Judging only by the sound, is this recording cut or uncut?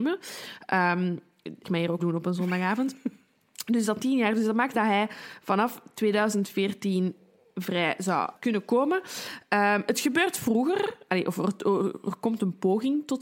cut